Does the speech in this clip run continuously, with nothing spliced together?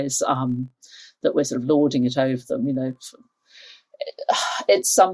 yes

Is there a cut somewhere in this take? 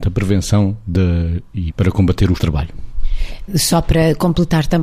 yes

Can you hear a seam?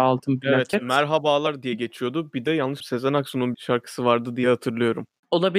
yes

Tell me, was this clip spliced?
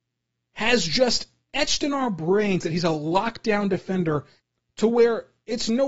no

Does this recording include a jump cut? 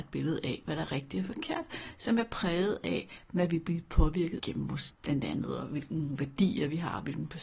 yes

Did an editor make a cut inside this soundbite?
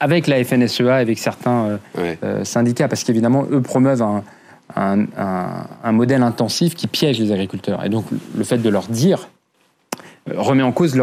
no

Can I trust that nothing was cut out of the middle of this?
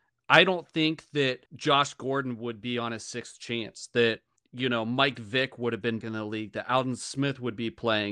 no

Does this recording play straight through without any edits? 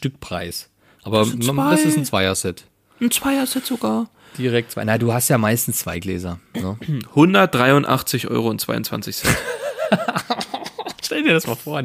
yes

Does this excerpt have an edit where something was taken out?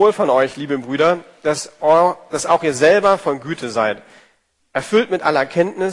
no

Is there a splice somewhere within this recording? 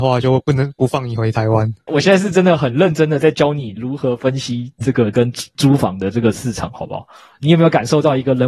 yes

